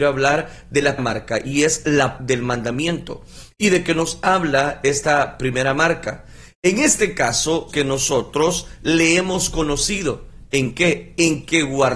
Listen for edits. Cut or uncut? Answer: cut